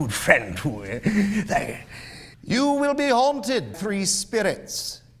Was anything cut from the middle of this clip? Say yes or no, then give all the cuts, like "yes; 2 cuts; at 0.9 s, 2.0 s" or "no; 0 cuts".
yes; 2 cuts; at 2.3 s, 3.7 s